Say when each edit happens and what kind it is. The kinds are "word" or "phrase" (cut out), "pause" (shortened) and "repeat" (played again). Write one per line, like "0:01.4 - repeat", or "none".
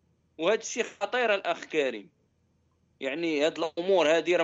none